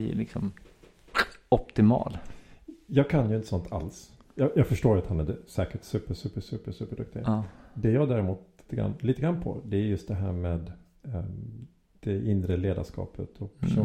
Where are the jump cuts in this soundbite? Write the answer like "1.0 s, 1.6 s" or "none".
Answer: 8.7 s